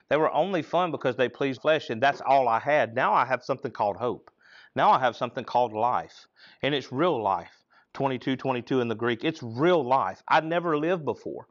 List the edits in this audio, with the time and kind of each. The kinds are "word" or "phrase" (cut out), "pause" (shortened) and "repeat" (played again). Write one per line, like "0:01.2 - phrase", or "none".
0:01.6 - word